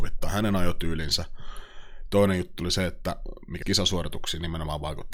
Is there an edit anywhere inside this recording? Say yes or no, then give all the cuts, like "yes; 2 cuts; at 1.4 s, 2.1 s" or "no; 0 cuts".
yes; 1 cut; at 3.6 s